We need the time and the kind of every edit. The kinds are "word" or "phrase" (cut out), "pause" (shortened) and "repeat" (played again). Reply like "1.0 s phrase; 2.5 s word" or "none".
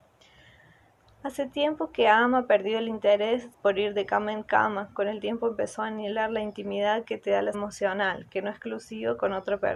3.5 s pause; 7.5 s word